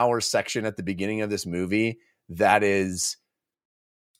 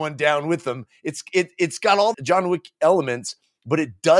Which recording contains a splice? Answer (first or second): second